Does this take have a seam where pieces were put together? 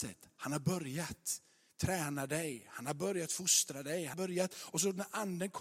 yes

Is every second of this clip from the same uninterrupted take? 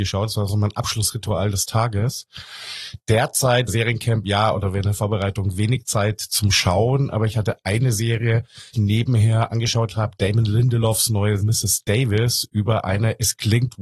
no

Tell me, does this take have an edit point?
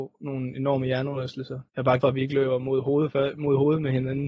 yes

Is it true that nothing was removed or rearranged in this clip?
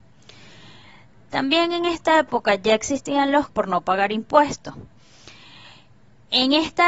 no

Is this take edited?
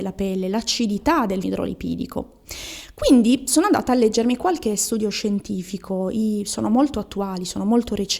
yes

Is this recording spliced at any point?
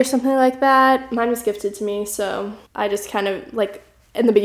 yes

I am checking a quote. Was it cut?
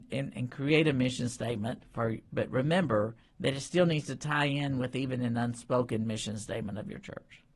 yes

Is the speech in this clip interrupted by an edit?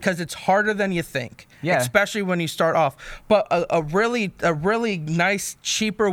no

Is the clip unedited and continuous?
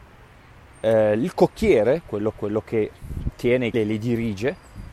no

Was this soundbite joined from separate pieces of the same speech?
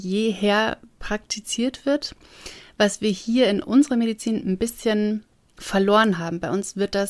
no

